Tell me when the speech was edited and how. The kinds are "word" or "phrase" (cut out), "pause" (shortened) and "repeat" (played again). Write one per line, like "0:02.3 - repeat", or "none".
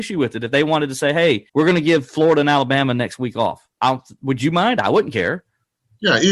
0:01.5 - pause
0:03.7 - pause